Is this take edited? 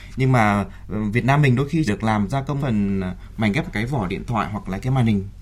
yes; 3 cuts; at 1.9 s, 2.6 s, 3.7 s

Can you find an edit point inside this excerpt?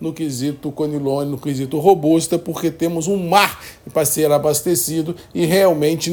no; 0 cuts

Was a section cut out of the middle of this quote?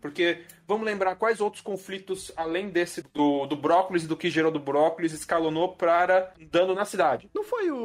yes; 2 cuts; at 3.0 s, 6.3 s

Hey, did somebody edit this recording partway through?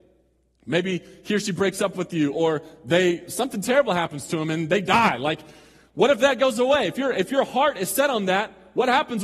no; 0 cuts

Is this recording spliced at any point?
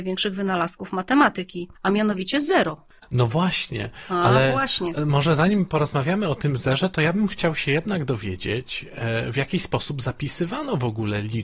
yes; 1 cut; at 1.8 s

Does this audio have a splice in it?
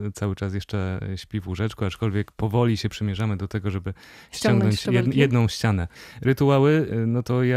no; 0 cuts

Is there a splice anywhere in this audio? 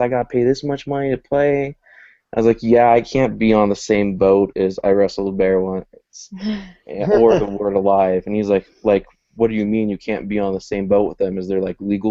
no; 0 cuts

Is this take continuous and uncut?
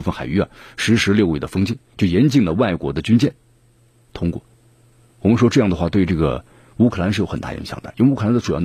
yes; 0 cuts

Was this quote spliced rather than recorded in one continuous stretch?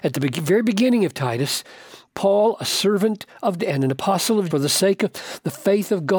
yes; 2 cuts; at 3.6 s, 4.5 s

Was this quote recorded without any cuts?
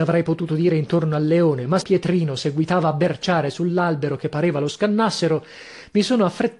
no; 1 cut; at 1.8 s

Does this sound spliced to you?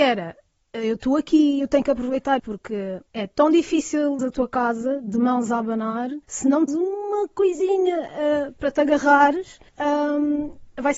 yes; 6 cuts; at 2.4 s, 3.1 s, 4.2 s, 6.2 s, 6.7 s, 9.7 s

